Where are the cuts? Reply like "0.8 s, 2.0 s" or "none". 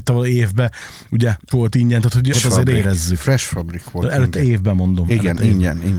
1.5 s, 2.3 s